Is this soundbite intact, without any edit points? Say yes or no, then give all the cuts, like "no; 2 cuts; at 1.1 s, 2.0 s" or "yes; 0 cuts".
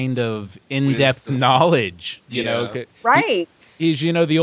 yes; 0 cuts